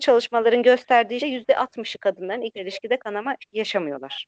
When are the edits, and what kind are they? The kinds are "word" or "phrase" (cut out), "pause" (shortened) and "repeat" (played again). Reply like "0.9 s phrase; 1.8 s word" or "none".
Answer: 1.2 s word; 2.5 s word